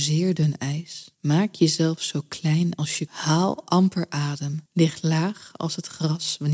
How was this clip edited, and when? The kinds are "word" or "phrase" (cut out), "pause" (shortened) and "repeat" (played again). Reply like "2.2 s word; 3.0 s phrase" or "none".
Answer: 1.1 s pause; 3.1 s word; 4.7 s pause